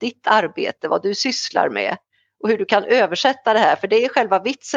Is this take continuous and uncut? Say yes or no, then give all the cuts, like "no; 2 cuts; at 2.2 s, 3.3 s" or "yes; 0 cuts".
yes; 0 cuts